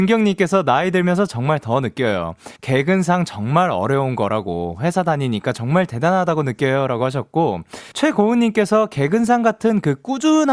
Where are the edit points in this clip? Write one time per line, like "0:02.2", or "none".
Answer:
0:02.6
0:07.9